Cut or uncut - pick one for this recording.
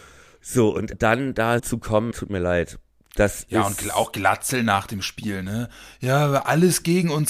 cut